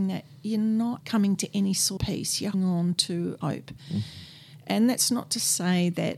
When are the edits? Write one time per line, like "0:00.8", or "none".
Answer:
0:01.0
0:02.0
0:02.5
0:03.4